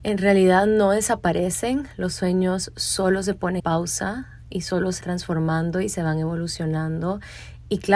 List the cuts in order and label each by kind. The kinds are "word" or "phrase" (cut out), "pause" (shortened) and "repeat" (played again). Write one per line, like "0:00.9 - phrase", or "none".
0:03.6 - word
0:05.0 - word